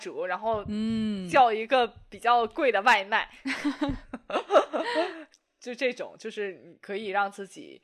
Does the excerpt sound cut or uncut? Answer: uncut